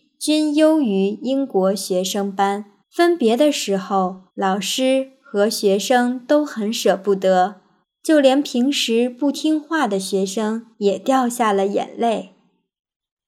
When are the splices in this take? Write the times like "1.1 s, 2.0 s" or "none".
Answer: 2.8 s, 4.3 s, 7.8 s, 10.7 s

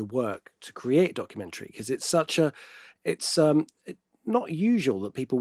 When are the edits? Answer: none

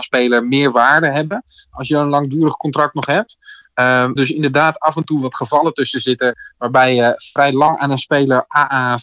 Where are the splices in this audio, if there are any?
4.2 s

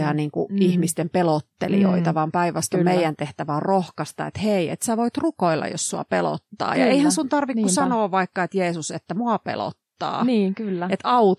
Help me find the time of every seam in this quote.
none

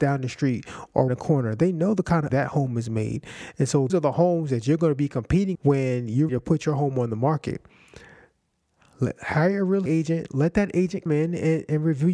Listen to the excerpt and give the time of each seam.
1.1 s, 2.3 s, 3.9 s, 5.5 s, 6.3 s, 9.9 s, 11.1 s

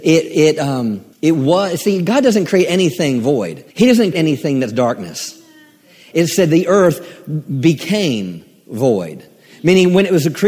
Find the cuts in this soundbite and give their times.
1.1 s, 3.7 s, 4.1 s

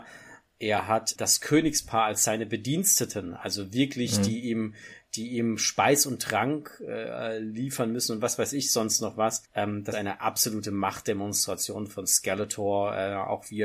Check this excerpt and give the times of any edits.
1.2 s, 9.5 s, 9.9 s

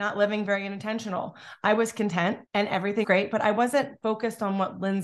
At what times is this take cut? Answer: 2.5 s, 3.0 s

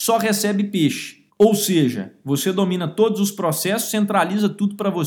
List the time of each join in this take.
1.3 s

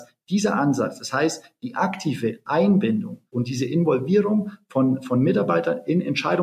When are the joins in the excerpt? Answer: 3.3 s

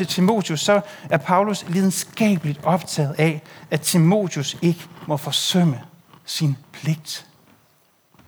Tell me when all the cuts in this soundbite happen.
6.6 s

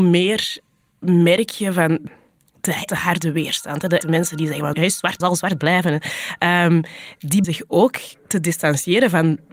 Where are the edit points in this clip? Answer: 2.9 s, 4.0 s, 4.7 s, 5.2 s, 7.4 s

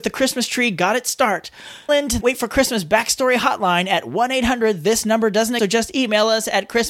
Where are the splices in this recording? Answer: 1.9 s, 2.2 s, 5.6 s

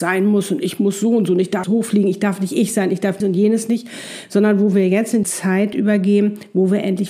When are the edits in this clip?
1.6 s, 3.2 s, 5.2 s

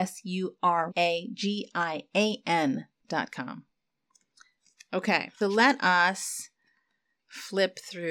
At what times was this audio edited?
0.9 s, 5.4 s

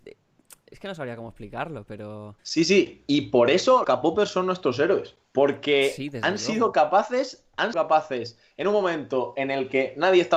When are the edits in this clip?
2.4 s, 3.8 s, 5.2 s, 7.7 s

